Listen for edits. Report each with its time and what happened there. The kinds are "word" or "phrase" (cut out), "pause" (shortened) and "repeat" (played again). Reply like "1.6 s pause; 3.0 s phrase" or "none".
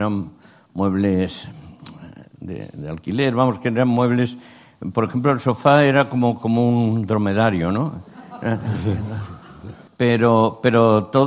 2.3 s pause; 9.9 s pause